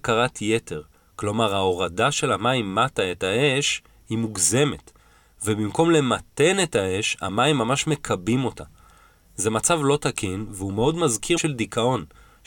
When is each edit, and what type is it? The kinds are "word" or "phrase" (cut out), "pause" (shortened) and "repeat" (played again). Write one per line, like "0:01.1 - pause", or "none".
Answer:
0:11.4 - word